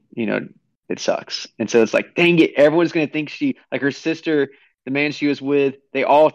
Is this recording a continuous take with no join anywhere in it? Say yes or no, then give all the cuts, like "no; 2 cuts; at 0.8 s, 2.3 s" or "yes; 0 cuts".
yes; 0 cuts